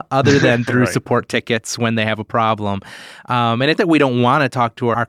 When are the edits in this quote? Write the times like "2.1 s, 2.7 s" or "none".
3.8 s